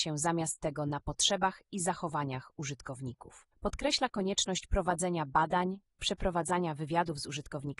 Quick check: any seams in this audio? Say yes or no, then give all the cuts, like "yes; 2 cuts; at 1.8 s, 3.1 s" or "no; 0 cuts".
yes; 1 cut; at 3.5 s